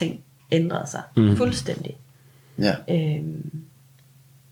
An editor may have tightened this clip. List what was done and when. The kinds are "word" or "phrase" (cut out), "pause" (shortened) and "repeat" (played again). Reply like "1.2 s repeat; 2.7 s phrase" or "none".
none